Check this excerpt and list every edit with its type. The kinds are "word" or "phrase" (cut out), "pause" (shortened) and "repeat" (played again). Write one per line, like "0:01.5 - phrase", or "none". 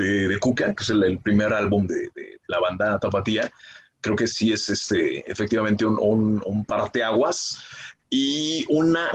0:04.3 - word